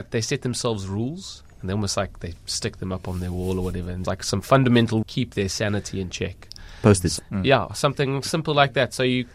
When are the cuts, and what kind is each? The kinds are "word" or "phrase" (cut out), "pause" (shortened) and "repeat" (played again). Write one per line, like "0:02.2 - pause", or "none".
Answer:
0:04.1 - word
0:05.0 - phrase
0:07.2 - word